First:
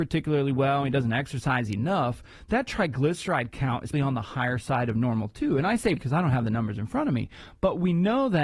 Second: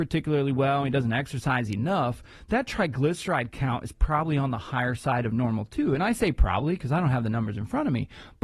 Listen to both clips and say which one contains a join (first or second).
first